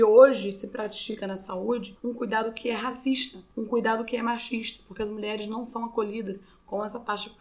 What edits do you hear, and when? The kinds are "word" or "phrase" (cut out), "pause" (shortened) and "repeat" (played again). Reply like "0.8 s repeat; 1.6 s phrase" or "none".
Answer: none

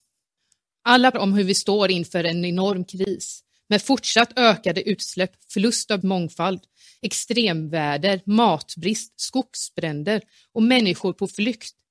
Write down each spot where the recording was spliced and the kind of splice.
1.1 s word; 6.0 s word

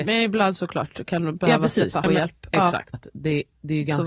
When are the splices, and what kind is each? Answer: 2.0 s word; 2.9 s phrase

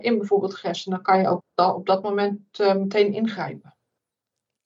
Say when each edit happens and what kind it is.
1.4 s word

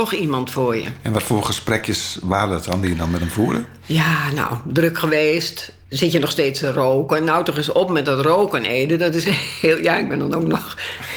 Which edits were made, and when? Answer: 5.8 s pause

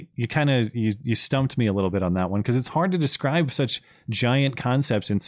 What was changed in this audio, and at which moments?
none

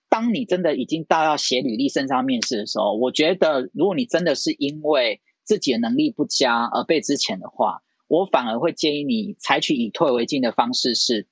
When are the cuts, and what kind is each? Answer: none

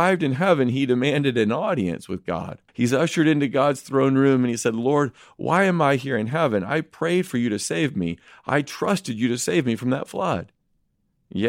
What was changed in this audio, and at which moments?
2.7 s pause

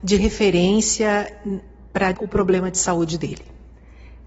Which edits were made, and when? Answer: 2.1 s phrase

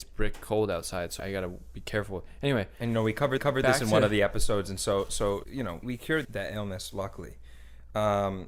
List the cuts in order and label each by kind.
1.2 s word; 3.4 s repeat; 5.4 s word; 5.8 s word; 6.2 s word

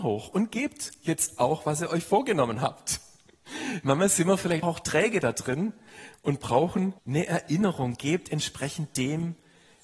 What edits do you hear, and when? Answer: 4.6 s word; 7.0 s pause

